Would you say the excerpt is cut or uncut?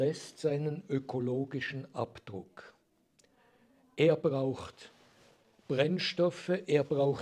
uncut